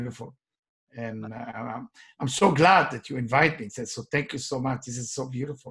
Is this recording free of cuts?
yes; 0 cuts

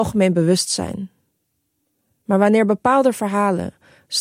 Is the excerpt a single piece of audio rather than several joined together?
yes; 0 cuts

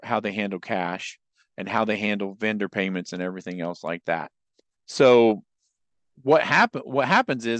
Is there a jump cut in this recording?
no; 0 cuts

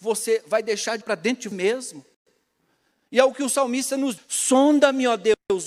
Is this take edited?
yes; 3 cuts; at 1.0 s, 1.5 s, 4.2 s

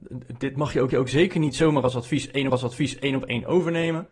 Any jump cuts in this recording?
yes; 2 cuts; at 0.9 s, 2.5 s

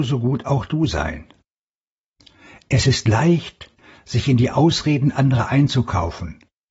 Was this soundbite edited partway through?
no; 0 cuts

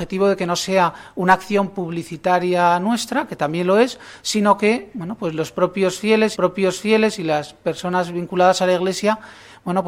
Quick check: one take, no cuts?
no; 1 cut; at 6.3 s

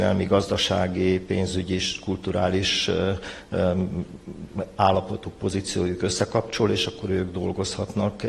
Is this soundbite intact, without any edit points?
yes; 0 cuts

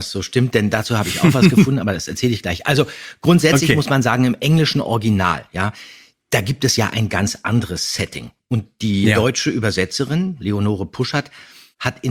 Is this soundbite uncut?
yes; 0 cuts

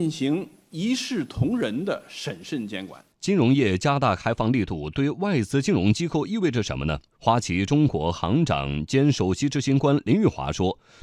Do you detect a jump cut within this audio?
yes; 2 cuts; at 3.1 s, 7.1 s

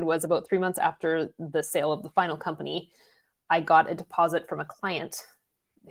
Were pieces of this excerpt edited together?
no; 0 cuts

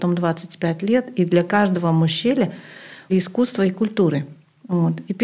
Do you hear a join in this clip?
yes; 1 cut; at 3.1 s

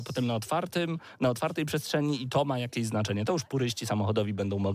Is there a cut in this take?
no; 0 cuts

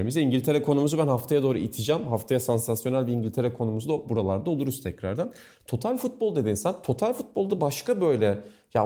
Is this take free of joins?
yes; 0 cuts

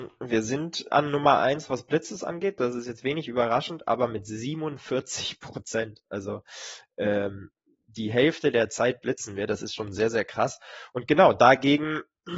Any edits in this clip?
yes; 1 cut; at 0.9 s

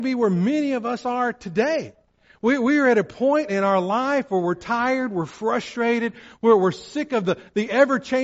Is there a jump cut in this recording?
no; 0 cuts

